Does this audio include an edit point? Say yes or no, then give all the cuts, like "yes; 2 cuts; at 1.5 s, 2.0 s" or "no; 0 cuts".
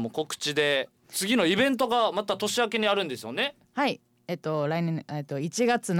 yes; 1 cut; at 1.0 s